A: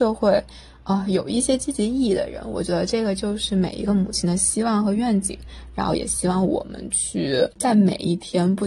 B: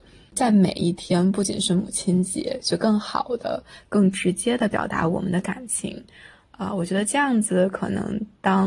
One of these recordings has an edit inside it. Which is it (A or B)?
A